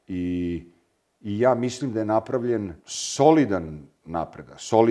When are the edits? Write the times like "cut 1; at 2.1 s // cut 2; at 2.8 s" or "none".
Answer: cut 1; at 2.8 s